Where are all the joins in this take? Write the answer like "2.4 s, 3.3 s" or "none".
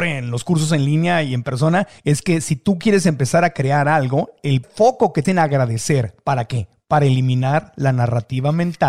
2.0 s, 4.6 s, 5.2 s